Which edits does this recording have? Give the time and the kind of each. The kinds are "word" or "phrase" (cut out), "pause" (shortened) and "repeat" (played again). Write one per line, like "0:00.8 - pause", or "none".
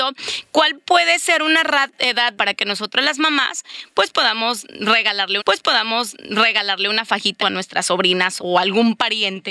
0:02.3 - word
0:05.4 - repeat
0:07.4 - phrase
0:08.4 - word